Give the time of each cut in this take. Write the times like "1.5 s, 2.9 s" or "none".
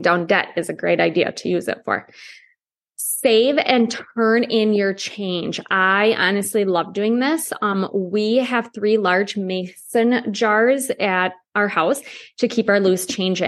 none